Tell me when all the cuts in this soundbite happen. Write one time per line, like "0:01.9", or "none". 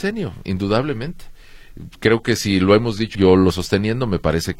0:03.1
0:03.5